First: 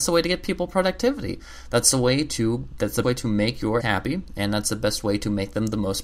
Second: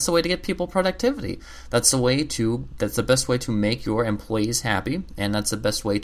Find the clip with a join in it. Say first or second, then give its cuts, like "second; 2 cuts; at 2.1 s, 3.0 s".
first; 2 cuts; at 3.0 s, 3.8 s